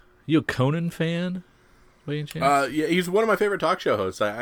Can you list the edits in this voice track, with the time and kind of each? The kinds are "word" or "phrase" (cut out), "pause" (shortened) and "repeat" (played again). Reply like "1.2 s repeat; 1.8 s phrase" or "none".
none